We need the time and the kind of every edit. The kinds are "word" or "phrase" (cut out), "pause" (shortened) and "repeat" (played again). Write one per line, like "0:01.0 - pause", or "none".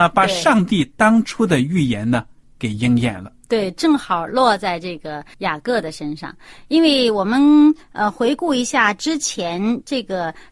0:05.3 - pause